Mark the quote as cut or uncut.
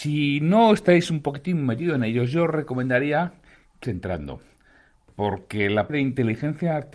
cut